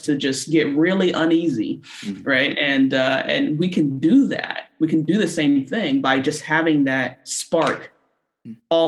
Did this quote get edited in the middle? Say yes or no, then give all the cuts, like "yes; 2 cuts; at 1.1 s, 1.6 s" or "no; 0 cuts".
no; 0 cuts